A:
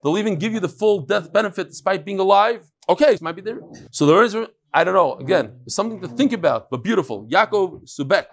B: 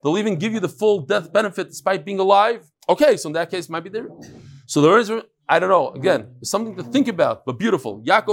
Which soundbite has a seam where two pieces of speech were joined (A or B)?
A